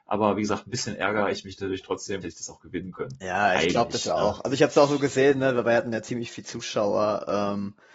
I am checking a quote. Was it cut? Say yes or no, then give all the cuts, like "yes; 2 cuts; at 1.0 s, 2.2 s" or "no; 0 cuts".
yes; 1 cut; at 2.2 s